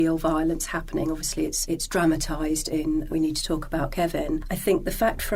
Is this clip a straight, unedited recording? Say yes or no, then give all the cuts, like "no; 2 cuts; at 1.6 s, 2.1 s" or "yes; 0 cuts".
no; 1 cut; at 3.1 s